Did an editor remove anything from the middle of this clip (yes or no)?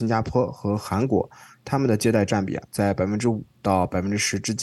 no